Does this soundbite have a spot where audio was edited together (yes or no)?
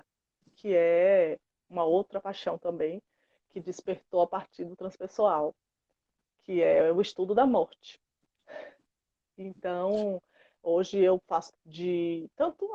yes